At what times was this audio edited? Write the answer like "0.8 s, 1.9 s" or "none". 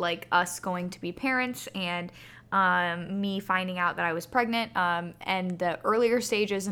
none